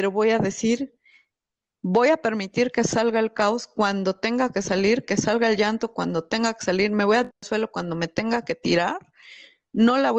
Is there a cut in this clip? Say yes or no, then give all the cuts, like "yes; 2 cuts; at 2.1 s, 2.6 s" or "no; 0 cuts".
no; 0 cuts